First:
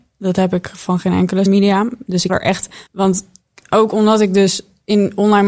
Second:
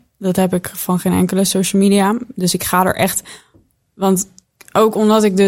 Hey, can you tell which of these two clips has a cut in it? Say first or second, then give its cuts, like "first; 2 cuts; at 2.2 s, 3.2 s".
first; 3 cuts; at 1.5 s, 2.3 s, 2.9 s